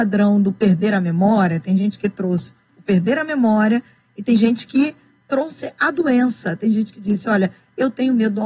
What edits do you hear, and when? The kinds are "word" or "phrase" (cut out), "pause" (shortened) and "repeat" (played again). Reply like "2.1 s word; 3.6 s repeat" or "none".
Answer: none

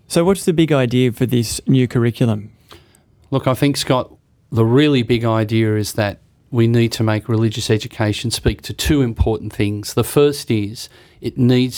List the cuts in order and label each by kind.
none

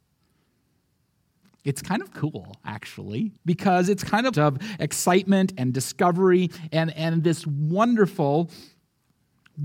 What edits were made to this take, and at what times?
3.4 s pause; 4.3 s phrase

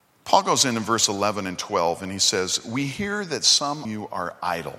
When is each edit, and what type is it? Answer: 3.8 s word

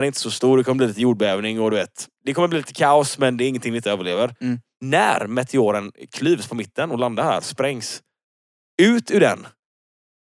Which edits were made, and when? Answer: none

